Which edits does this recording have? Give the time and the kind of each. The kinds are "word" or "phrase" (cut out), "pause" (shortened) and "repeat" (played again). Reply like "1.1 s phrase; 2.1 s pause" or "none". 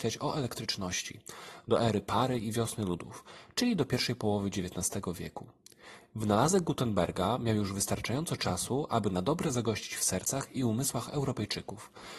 none